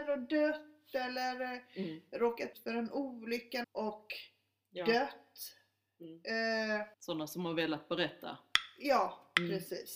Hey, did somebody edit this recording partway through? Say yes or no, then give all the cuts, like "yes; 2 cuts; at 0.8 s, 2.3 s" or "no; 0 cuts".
yes; 3 cuts; at 2.5 s, 3.6 s, 6.9 s